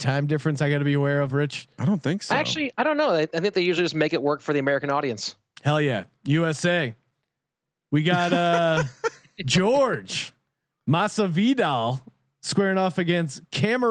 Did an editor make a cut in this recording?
no; 0 cuts

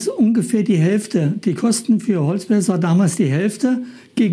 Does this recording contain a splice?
no; 0 cuts

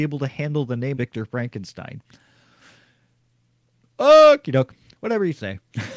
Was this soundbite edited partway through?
yes; 1 cut; at 0.9 s

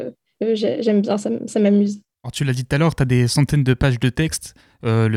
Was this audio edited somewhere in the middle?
no; 0 cuts

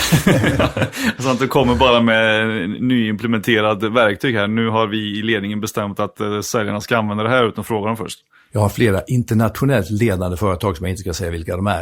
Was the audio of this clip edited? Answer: no; 0 cuts

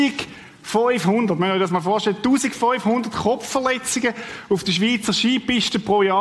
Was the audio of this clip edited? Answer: no; 0 cuts

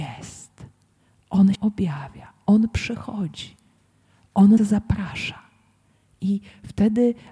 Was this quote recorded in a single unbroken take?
no; 2 cuts; at 1.5 s, 4.6 s

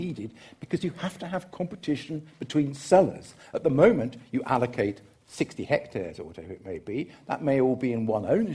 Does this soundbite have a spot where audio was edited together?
no; 0 cuts

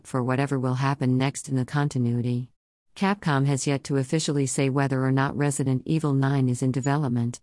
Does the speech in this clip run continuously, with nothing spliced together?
no; 1 cut; at 2.7 s

